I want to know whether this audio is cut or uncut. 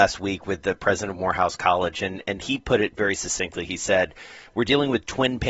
uncut